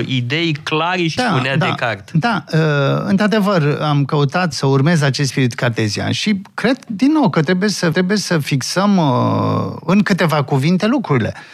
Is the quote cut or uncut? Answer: cut